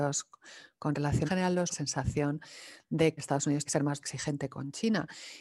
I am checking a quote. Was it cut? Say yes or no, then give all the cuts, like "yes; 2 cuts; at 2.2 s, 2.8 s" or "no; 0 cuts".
yes; 5 cuts; at 1.3 s, 1.7 s, 3.2 s, 3.7 s, 4.0 s